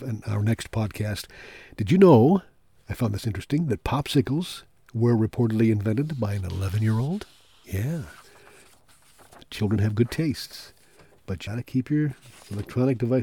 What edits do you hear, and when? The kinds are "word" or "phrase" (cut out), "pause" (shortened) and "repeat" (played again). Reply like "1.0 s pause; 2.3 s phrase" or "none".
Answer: 11.5 s word